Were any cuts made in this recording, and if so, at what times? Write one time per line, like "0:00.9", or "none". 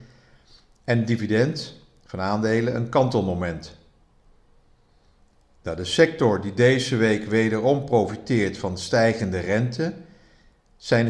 none